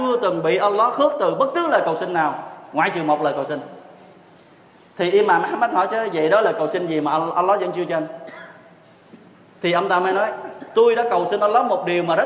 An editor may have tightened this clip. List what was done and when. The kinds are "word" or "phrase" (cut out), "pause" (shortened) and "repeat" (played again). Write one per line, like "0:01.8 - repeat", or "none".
none

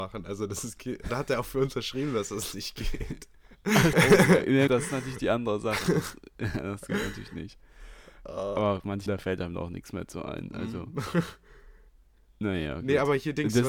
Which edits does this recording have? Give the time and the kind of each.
0:01.1 - word
0:03.9 - word
0:04.7 - word
0:09.1 - word

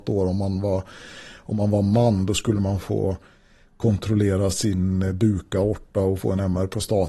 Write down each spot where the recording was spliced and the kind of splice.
none

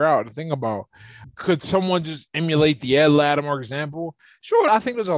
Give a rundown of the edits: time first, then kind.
none

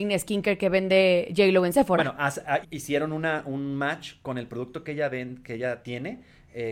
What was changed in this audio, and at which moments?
0:02.6 - word

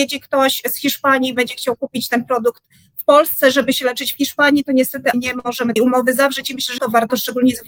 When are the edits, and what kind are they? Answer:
0:05.1 - word
0:05.8 - word
0:06.8 - word

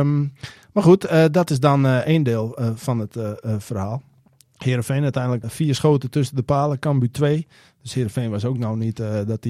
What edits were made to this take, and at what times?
0:05.4 - word

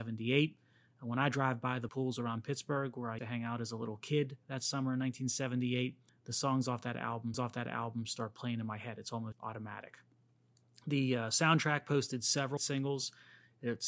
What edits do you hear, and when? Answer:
0:01.9 - word
0:03.2 - word
0:06.1 - pause
0:07.3 - repeat
0:09.3 - word
0:12.6 - word

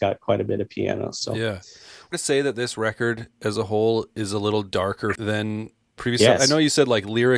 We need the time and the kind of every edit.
0:02.1 - phrase
0:05.2 - word
0:06.0 - word

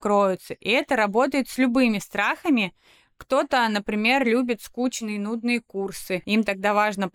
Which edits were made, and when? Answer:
none

